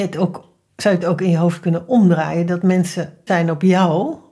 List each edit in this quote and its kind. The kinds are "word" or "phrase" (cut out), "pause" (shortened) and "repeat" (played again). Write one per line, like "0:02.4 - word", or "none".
0:03.3 - word